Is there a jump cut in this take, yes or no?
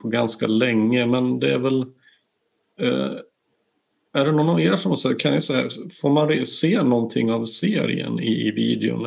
no